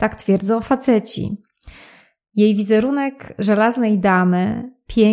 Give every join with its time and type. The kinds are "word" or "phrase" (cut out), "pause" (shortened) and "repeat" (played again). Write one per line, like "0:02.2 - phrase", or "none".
none